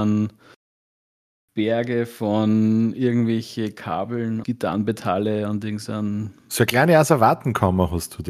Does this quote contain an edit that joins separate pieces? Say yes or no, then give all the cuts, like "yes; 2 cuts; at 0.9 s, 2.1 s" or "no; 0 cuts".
yes; 1 cut; at 4.4 s